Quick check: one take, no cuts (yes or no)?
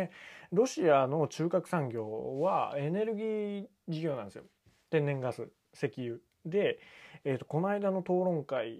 yes